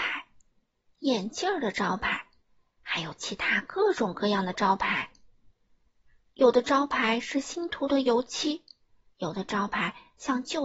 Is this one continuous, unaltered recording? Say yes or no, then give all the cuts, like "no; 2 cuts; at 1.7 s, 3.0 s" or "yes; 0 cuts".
yes; 0 cuts